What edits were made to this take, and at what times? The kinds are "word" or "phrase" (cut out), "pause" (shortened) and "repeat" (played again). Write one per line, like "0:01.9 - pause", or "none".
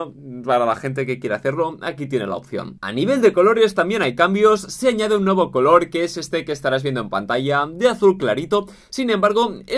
none